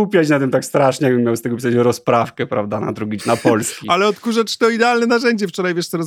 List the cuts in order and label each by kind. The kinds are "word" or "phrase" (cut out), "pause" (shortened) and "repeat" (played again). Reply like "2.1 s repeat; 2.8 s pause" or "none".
3.2 s word